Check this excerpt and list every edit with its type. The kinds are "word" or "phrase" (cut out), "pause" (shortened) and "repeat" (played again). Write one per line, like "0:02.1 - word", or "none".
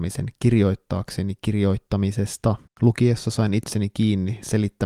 0:02.7 - pause